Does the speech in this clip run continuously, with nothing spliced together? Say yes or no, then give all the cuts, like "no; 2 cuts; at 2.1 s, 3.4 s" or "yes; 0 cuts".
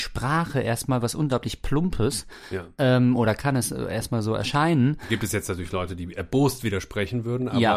yes; 0 cuts